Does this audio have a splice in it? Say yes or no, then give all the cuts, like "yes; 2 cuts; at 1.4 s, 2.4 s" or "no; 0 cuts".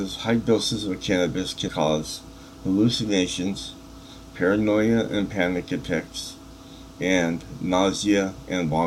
yes; 1 cut; at 1.7 s